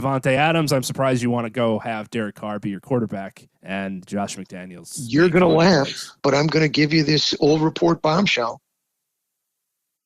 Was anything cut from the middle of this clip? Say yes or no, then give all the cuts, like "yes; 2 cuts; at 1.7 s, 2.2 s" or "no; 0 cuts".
yes; 2 cuts; at 3.5 s, 6.2 s